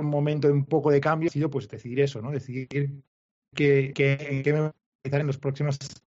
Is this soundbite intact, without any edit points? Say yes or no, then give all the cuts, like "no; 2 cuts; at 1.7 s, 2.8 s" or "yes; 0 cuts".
no; 2 cuts; at 1.3 s, 3.9 s